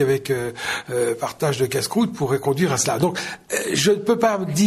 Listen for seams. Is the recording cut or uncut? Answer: uncut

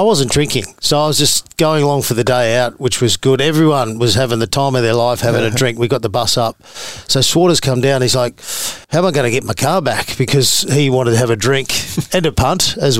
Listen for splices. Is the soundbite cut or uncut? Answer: cut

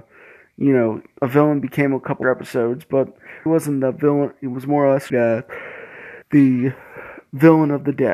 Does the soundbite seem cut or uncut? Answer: cut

